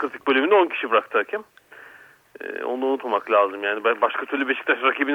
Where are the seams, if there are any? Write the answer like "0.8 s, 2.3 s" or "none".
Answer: none